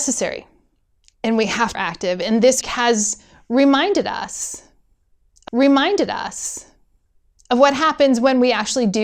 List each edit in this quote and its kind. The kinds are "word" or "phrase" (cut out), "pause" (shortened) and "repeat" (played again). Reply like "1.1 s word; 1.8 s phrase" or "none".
1.7 s phrase; 2.6 s word; 5.5 s repeat